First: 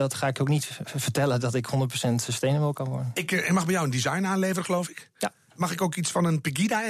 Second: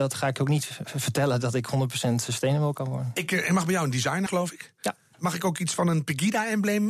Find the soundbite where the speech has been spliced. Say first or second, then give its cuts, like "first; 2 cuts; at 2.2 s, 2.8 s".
second; 1 cut; at 4.3 s